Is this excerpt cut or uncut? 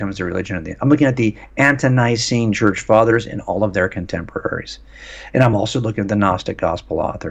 uncut